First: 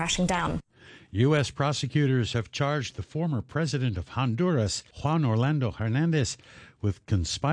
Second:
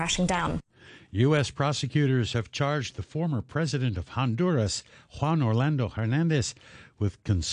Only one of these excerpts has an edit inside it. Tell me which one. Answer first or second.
first